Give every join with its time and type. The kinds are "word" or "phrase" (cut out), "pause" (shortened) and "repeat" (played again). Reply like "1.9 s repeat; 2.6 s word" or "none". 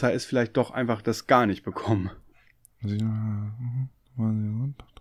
none